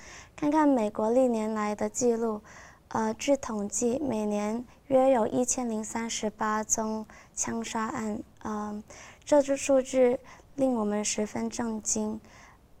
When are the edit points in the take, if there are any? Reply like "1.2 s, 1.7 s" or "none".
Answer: 8.3 s